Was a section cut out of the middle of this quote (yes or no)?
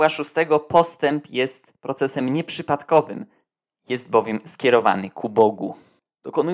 no